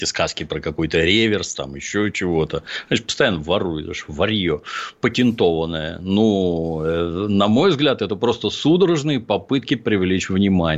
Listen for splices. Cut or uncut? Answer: uncut